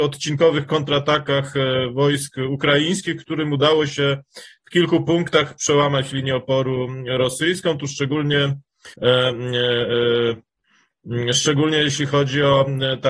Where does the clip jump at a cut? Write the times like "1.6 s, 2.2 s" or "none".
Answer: 8.9 s

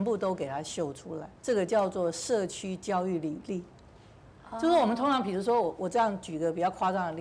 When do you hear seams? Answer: 1.4 s

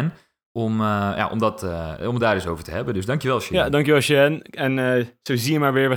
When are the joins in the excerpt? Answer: none

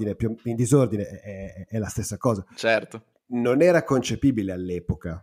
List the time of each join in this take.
3.1 s

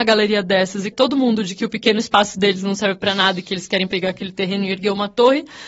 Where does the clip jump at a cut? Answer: 0.9 s

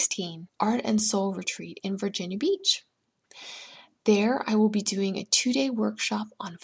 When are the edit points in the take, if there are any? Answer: none

